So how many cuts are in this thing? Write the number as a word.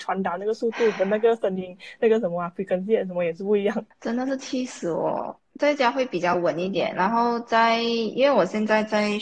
one